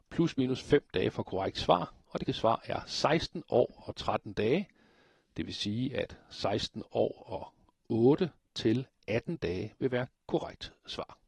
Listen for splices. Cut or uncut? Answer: cut